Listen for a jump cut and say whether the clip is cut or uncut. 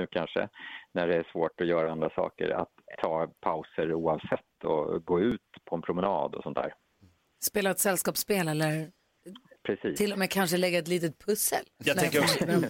cut